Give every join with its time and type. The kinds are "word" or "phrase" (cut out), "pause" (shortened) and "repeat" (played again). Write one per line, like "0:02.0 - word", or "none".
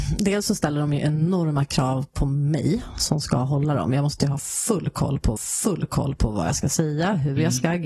0:05.4 - repeat